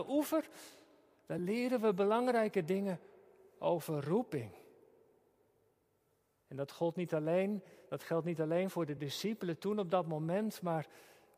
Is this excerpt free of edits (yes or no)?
yes